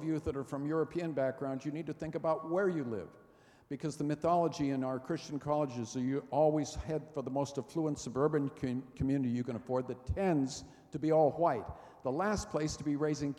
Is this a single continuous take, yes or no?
yes